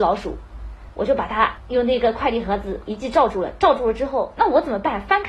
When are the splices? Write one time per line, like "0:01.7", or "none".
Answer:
0:02.9

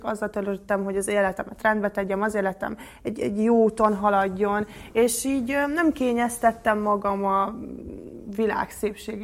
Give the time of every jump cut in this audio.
none

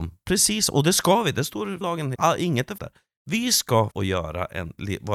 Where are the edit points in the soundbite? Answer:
0:01.8
0:02.1
0:02.8
0:03.9

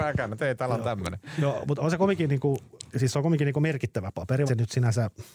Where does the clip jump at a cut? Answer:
0:04.5

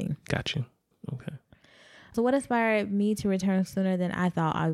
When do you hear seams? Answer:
none

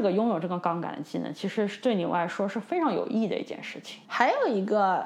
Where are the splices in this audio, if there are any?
0:04.0

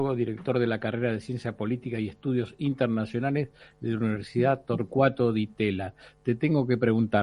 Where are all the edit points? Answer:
none

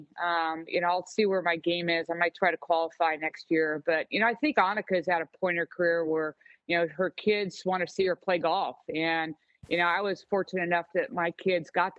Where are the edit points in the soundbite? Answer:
none

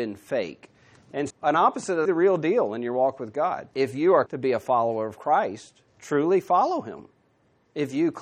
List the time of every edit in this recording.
0:01.3
0:02.1
0:03.7
0:04.3
0:05.9

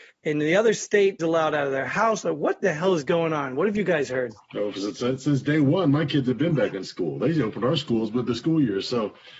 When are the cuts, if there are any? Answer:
0:01.2

